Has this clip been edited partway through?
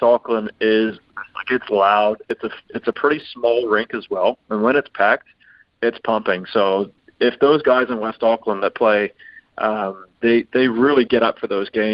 no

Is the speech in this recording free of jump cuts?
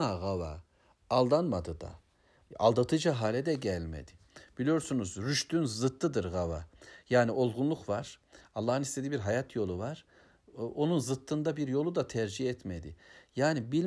yes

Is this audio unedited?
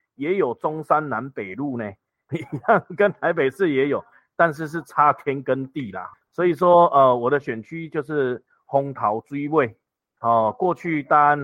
no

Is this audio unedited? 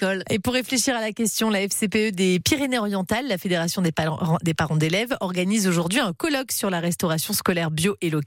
yes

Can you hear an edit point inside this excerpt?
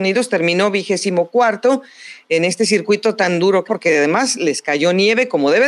yes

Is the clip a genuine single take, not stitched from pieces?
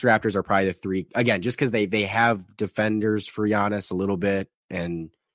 yes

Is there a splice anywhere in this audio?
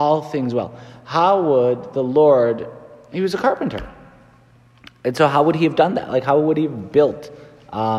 no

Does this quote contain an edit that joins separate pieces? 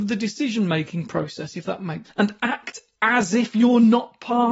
yes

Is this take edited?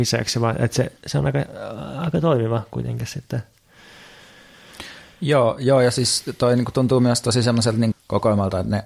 yes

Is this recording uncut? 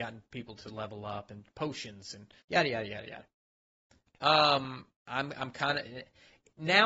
no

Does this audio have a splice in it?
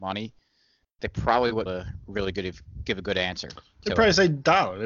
yes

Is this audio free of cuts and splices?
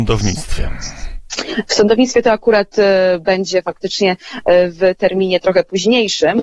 yes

